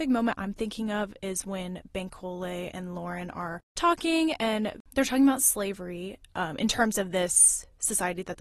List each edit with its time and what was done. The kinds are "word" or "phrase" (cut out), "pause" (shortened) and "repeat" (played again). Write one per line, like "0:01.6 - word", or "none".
0:04.8 - pause